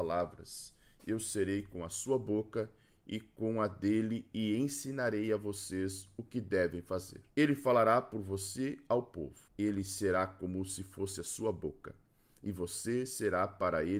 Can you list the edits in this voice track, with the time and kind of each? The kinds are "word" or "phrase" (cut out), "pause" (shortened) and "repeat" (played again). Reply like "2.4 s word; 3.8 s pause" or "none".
7.3 s pause; 9.5 s pause